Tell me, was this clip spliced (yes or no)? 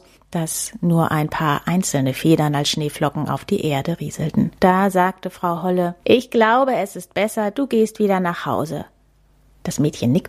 yes